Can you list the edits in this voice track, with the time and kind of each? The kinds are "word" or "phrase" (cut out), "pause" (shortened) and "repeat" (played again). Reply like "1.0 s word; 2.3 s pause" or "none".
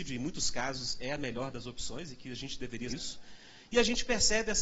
2.9 s word